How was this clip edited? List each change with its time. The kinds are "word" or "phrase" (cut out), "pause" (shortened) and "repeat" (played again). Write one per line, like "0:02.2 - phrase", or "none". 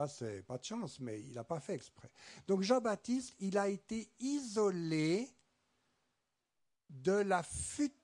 none